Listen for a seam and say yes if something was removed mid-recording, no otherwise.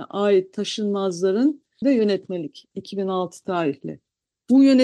yes